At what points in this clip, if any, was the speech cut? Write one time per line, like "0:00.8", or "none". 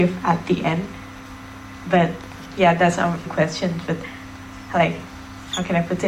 0:03.3
0:04.7